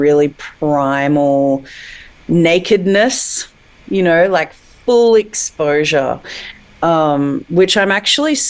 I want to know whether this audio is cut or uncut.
uncut